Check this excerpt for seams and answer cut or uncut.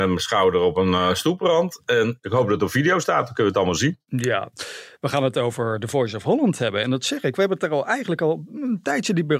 uncut